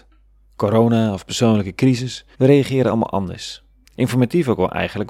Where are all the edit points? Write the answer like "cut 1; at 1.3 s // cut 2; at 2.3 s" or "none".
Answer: cut 1; at 2.3 s // cut 2; at 3.8 s